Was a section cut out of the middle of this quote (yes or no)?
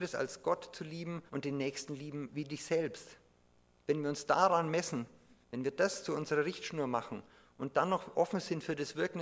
yes